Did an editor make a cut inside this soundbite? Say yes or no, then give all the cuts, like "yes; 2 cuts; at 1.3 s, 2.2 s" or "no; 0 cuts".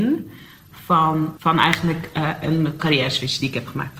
yes; 2 cuts; at 1.4 s, 2.8 s